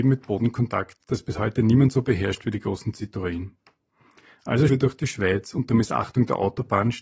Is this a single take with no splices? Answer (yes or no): no